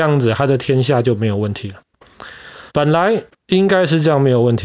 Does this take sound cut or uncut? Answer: cut